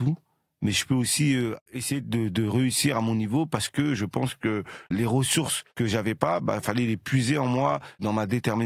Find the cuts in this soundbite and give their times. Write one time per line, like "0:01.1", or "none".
none